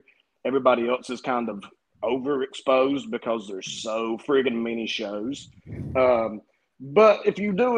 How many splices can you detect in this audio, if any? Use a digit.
0